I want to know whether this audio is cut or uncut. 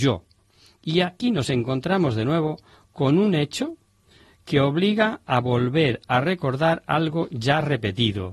uncut